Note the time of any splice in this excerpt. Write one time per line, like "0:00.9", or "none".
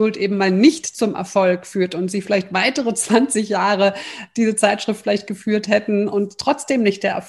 none